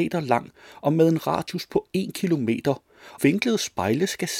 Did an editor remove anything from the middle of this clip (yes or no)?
yes